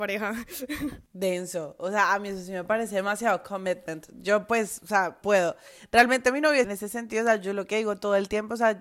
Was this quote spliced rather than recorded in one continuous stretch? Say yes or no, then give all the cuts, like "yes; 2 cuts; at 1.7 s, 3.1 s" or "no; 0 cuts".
yes; 2 cuts; at 5.2 s, 6.6 s